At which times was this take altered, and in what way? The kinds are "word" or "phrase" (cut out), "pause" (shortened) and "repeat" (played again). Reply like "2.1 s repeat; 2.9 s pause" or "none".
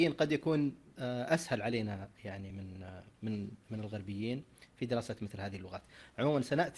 none